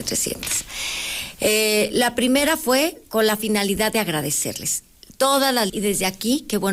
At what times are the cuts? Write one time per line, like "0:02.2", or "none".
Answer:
0:05.7